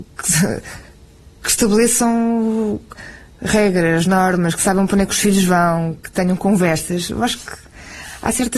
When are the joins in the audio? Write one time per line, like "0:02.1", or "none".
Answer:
none